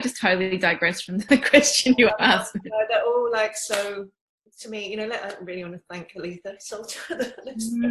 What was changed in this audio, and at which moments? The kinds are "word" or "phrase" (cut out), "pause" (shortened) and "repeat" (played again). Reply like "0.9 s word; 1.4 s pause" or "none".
none